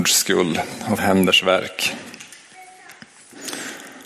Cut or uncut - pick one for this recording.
cut